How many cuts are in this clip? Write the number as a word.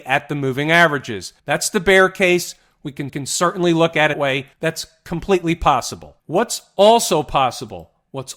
five